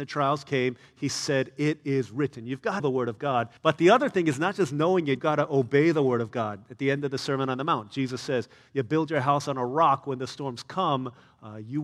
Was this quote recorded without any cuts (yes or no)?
no